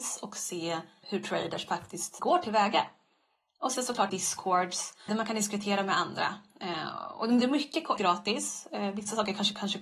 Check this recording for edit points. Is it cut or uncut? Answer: cut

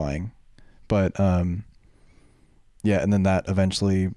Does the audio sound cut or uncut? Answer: uncut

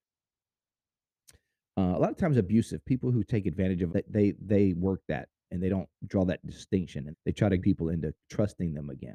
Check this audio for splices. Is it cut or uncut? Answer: cut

